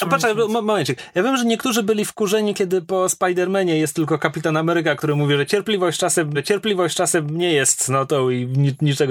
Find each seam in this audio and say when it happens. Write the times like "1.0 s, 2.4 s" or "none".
6.3 s